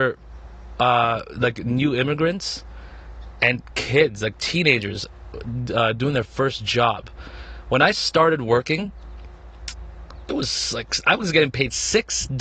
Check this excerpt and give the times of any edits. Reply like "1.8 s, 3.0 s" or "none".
none